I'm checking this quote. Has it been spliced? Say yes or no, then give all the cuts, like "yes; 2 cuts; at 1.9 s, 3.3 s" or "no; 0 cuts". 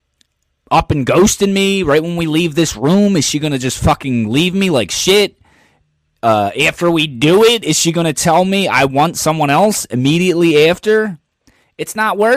no; 0 cuts